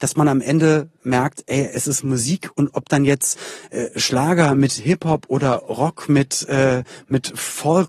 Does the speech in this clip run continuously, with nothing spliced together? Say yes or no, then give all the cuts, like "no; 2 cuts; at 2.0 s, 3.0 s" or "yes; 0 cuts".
yes; 0 cuts